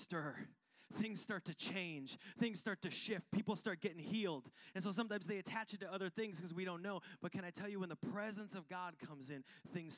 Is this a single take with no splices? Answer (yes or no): yes